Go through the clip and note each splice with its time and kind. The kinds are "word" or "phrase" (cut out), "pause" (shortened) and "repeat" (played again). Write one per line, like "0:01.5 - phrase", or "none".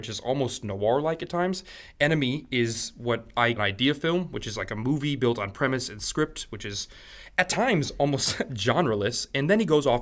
0:03.6 - word